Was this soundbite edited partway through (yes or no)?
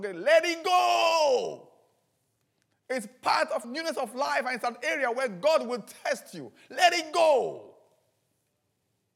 yes